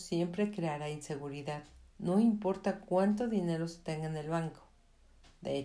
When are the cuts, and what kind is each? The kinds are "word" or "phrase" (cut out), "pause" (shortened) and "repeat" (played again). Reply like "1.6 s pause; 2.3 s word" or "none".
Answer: 1.9 s pause